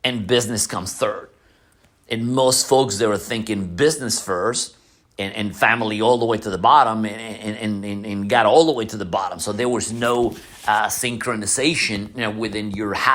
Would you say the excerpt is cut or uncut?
uncut